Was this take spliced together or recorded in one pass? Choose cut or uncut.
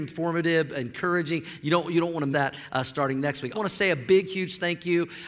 cut